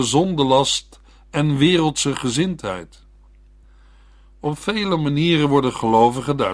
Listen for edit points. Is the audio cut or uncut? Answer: uncut